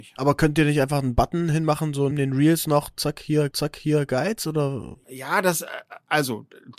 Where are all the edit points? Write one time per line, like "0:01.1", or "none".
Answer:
0:02.1
0:03.5